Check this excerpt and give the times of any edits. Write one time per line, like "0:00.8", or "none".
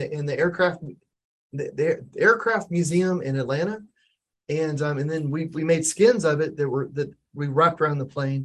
none